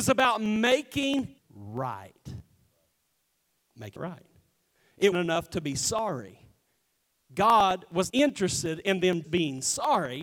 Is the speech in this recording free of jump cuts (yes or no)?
no